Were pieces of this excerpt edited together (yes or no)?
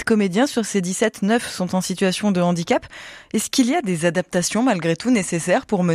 no